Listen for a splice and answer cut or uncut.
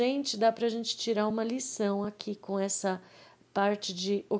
uncut